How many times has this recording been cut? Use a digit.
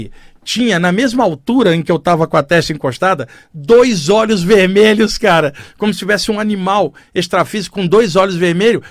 0